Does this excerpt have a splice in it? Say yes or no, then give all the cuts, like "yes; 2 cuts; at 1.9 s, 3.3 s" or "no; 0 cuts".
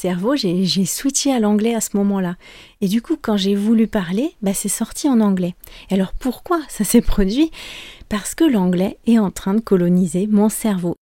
no; 0 cuts